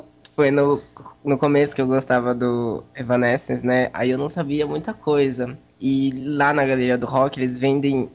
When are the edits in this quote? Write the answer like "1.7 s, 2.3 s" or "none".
none